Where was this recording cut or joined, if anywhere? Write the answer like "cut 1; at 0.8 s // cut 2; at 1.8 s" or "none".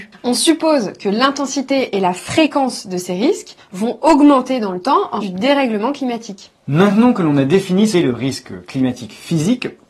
cut 1; at 5.2 s // cut 2; at 7.9 s